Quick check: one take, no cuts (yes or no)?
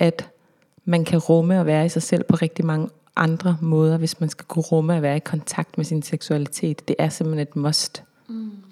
yes